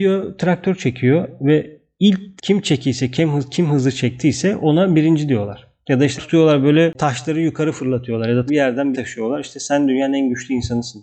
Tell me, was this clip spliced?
yes; 4 cuts; at 2.4 s, 6.2 s, 8.5 s, 8.9 s

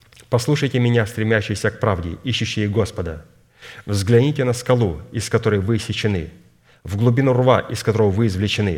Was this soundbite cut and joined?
no; 0 cuts

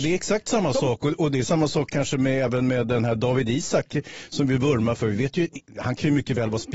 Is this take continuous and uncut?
yes; 0 cuts

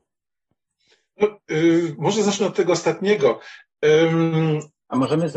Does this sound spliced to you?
no; 0 cuts

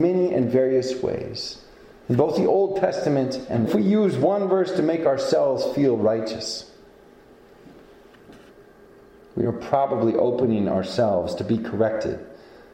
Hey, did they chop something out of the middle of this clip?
yes; 1 cut; at 3.7 s

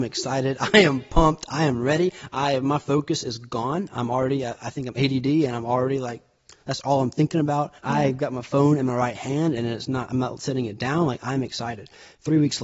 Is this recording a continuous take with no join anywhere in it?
no; 1 cut; at 7.8 s

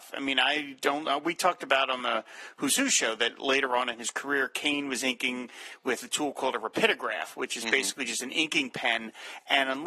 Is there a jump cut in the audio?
no; 0 cuts

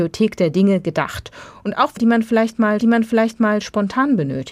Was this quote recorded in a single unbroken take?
no; 2 cuts; at 2.0 s, 2.8 s

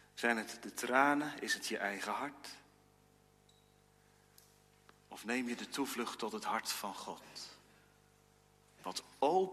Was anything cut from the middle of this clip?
no; 0 cuts

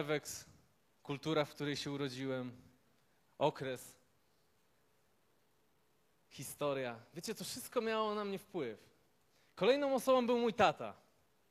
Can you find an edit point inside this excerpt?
no; 0 cuts

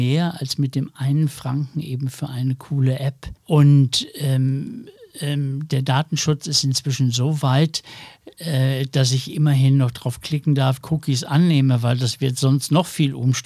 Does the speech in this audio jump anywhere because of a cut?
yes; 1 cut; at 10.8 s

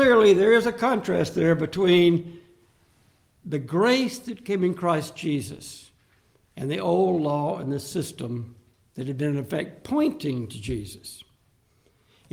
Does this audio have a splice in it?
no; 0 cuts

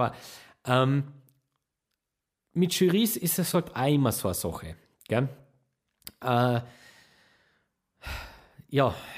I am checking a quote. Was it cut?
no; 0 cuts

